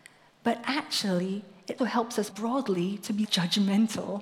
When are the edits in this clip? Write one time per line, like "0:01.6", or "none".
0:01.8
0:02.3
0:03.2